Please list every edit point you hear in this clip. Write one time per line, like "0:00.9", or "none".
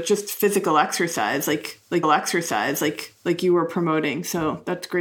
0:02.0